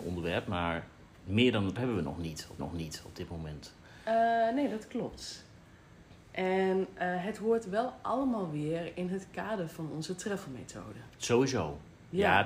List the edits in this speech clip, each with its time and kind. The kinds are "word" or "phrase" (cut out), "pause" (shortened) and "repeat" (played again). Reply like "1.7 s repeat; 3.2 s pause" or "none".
1.8 s word; 2.6 s repeat; 6.2 s pause